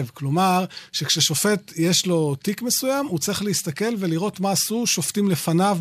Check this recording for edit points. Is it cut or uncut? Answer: uncut